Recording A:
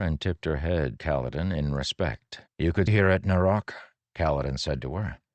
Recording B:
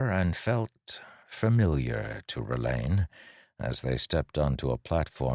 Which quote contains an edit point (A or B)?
A